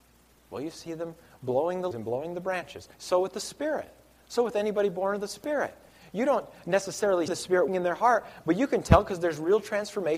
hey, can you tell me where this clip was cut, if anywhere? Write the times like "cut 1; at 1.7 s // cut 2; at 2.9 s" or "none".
cut 1; at 1.9 s // cut 2; at 2.9 s // cut 3; at 7.3 s // cut 4; at 7.7 s

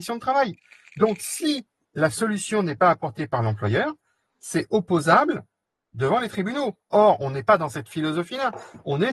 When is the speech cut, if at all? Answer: none

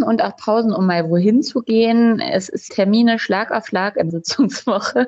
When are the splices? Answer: cut 1; at 2.7 s // cut 2; at 4.1 s

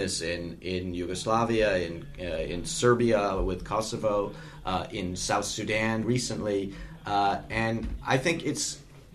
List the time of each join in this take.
cut 1; at 6.0 s

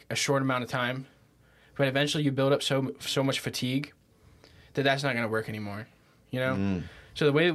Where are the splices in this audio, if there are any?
none

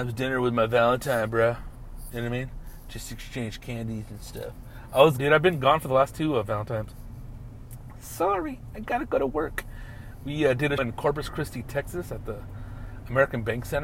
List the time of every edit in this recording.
cut 1; at 5.2 s // cut 2; at 10.8 s

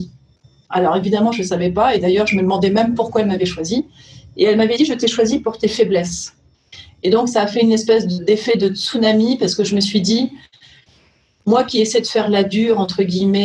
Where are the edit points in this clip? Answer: none

